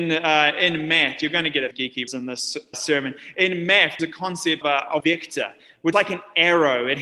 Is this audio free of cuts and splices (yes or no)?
no